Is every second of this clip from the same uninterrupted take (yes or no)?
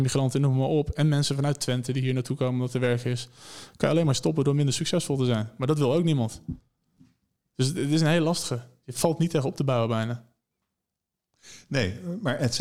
yes